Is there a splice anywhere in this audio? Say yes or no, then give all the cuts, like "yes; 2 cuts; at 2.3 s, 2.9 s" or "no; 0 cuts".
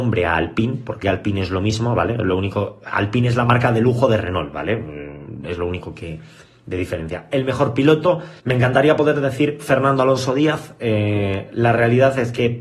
yes; 2 cuts; at 1.0 s, 8.4 s